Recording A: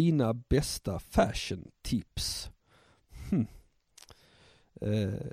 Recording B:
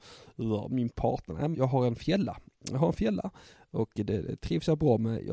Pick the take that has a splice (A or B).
B